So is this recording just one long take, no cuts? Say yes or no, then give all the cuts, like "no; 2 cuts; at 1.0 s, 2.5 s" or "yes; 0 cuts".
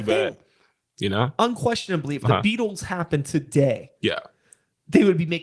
yes; 0 cuts